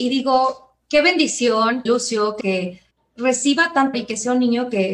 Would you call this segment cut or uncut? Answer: cut